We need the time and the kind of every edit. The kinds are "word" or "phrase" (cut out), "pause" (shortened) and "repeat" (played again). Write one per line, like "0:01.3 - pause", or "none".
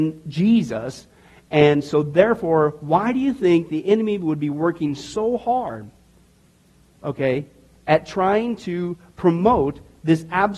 none